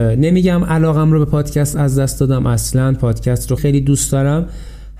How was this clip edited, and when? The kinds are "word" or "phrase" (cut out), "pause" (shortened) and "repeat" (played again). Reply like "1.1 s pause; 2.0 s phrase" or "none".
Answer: 3.6 s word